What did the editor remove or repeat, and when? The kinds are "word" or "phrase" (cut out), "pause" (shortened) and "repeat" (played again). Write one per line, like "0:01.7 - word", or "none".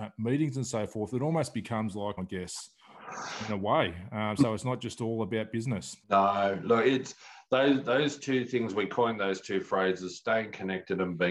0:02.2 - phrase
0:06.0 - pause